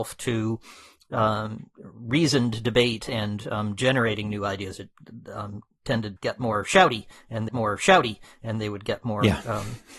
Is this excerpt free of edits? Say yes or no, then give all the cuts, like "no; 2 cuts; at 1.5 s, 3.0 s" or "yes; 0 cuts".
no; 2 cuts; at 6.2 s, 7.5 s